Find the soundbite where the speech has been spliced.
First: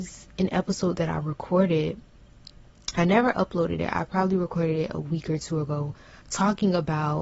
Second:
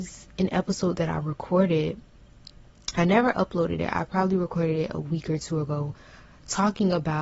first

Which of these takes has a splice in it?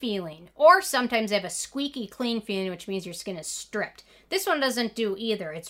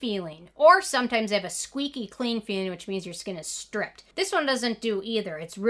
second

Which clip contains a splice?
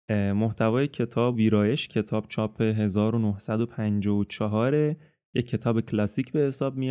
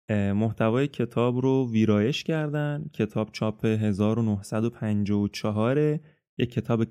first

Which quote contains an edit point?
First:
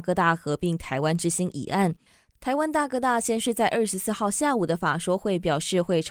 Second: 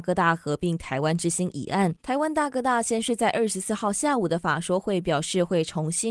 second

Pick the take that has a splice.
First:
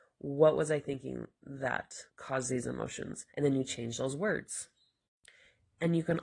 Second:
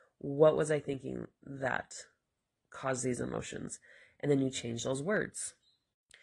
first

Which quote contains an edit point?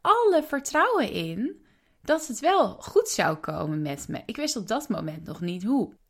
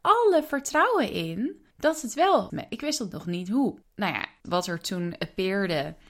second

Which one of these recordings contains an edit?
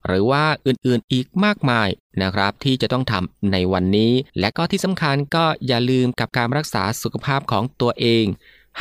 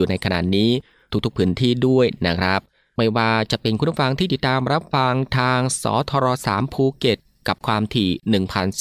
first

